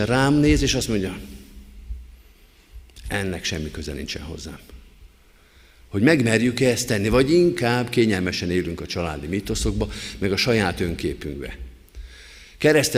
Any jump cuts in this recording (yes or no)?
no